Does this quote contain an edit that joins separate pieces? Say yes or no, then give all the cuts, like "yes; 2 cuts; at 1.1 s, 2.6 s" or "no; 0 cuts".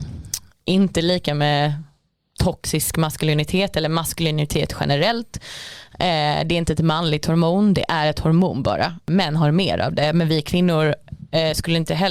no; 0 cuts